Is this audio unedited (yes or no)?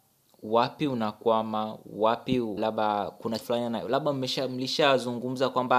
no